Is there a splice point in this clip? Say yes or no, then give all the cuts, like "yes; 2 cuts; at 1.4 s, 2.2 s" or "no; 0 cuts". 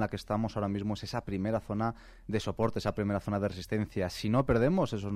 no; 0 cuts